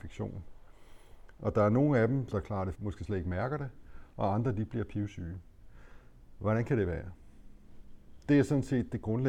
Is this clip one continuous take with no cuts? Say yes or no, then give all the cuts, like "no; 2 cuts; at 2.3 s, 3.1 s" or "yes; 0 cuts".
no; 2 cuts; at 2.3 s, 2.7 s